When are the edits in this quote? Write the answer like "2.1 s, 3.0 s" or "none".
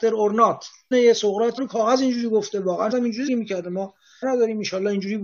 0.9 s, 1.6 s, 2.9 s, 3.3 s, 4.2 s

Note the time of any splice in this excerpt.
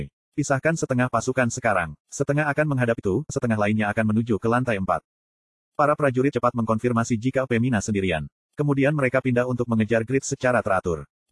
3.0 s, 3.3 s, 6.3 s

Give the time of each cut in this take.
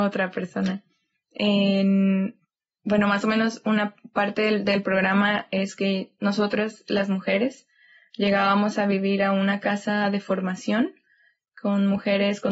none

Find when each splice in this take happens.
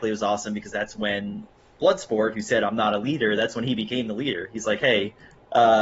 none

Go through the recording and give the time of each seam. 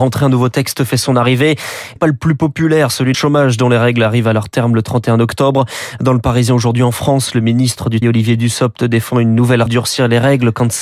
2.0 s, 3.1 s, 8.0 s, 9.7 s

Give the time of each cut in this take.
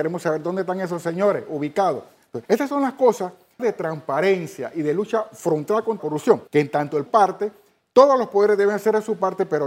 2.4 s, 3.6 s, 6.0 s, 6.5 s, 7.1 s

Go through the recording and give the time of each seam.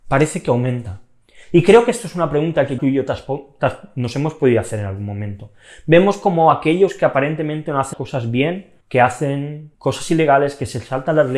2.8 s, 7.9 s, 8.8 s, 9.7 s

